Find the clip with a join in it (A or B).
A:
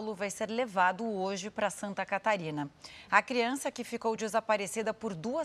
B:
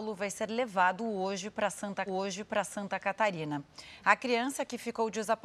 B